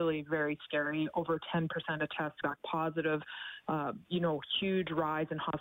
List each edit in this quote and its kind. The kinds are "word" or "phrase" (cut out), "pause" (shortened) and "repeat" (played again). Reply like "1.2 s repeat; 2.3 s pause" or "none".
2.4 s word